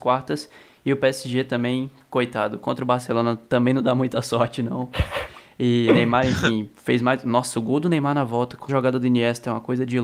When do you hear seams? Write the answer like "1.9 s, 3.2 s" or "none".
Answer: 8.7 s